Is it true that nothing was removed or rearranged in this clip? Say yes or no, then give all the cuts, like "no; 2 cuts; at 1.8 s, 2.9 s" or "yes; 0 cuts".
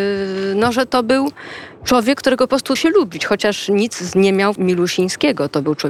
no; 2 cuts; at 2.8 s, 4.6 s